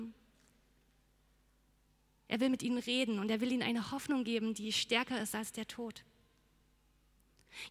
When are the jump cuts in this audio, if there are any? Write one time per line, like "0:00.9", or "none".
none